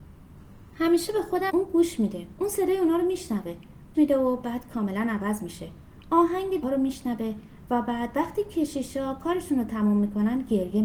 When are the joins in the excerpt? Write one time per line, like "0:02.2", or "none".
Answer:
0:01.5
0:02.3
0:03.9
0:06.6